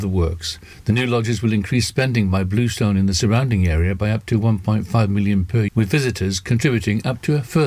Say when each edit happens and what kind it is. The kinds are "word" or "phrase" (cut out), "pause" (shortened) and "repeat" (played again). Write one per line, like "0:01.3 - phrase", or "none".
0:05.7 - word